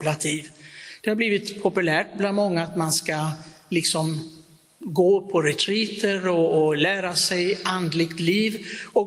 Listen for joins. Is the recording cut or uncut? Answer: uncut